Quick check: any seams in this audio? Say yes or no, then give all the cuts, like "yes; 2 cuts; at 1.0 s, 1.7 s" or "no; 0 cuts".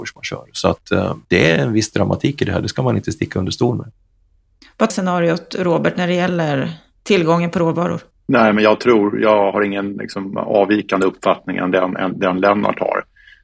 yes; 3 cuts; at 1.2 s, 4.9 s, 8.1 s